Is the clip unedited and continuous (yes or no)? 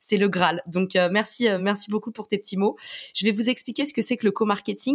yes